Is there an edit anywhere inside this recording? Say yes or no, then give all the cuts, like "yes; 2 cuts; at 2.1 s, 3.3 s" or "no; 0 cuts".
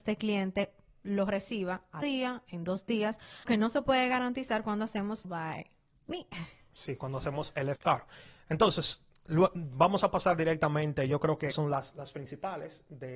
yes; 5 cuts; at 2.0 s, 3.5 s, 5.2 s, 7.8 s, 11.5 s